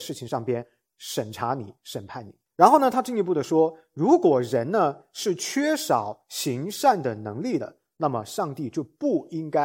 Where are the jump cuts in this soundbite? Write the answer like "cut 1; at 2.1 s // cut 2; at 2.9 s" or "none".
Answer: cut 1; at 2.5 s